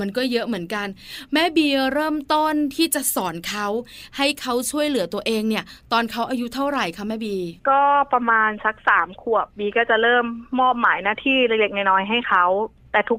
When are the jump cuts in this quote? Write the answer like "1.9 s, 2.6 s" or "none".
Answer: 7.6 s